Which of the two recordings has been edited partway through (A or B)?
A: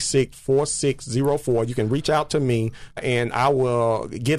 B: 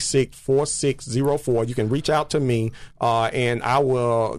A